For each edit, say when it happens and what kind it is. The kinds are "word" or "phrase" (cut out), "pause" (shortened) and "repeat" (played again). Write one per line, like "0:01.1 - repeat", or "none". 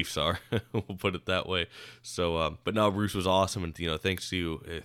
0:02.6 - pause